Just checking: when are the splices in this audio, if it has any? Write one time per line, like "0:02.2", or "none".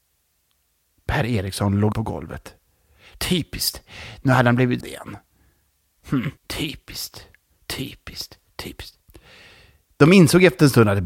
0:01.9
0:04.8
0:06.4